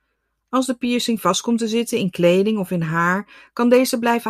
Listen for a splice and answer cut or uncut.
uncut